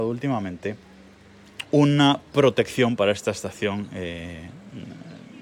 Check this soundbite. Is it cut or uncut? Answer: uncut